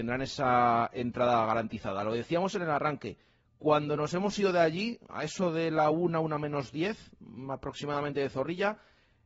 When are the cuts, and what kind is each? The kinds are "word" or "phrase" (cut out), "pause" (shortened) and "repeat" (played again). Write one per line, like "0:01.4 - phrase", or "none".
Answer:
none